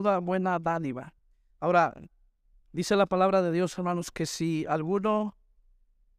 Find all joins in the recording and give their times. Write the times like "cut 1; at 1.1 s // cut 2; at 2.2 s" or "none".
none